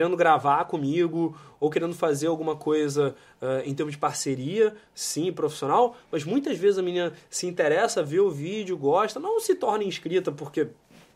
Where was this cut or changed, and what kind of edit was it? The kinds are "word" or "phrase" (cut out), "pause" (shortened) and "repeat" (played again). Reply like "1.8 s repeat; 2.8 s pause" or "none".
none